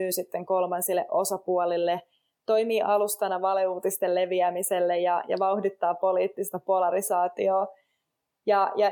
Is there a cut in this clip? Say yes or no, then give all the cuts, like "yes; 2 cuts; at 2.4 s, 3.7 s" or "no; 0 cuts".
no; 0 cuts